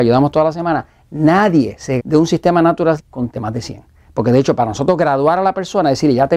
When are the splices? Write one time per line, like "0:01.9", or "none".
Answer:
0:02.0
0:03.0
0:03.3